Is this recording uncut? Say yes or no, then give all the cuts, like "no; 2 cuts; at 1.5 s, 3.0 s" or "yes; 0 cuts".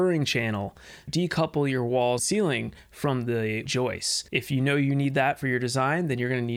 no; 4 cuts; at 1.1 s, 2.2 s, 3.7 s, 4.3 s